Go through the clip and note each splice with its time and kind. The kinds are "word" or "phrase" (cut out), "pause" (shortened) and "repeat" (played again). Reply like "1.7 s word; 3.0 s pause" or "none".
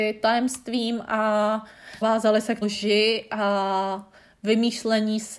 2.0 s word; 2.6 s phrase